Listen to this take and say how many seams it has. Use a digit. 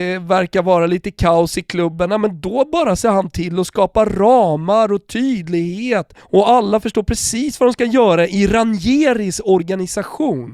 1